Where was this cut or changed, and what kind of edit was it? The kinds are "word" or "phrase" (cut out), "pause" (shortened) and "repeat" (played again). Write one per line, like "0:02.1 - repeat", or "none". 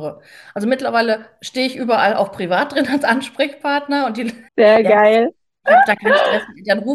0:04.5 - pause